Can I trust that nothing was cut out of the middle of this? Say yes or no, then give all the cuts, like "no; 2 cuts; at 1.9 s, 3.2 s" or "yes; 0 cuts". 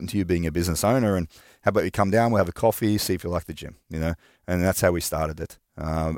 no; 1 cut; at 3.8 s